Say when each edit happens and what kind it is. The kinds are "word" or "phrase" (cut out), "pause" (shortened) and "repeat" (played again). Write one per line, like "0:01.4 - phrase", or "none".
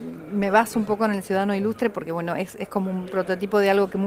none